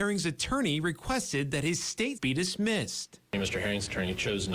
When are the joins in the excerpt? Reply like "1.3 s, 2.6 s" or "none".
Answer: 2.1 s